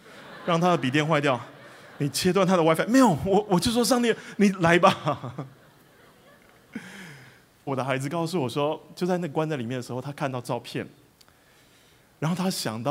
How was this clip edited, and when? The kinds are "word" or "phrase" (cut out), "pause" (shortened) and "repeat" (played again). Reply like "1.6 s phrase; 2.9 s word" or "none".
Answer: 7.7 s phrase